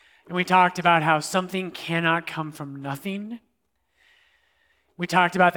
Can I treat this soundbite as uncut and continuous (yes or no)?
yes